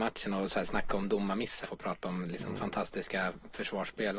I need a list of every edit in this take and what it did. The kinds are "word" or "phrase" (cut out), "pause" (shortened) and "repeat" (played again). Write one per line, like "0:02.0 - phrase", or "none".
0:01.6 - word